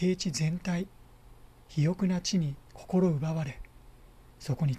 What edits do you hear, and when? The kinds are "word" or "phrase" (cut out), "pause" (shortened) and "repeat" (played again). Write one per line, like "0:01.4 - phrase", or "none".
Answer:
0:02.7 - pause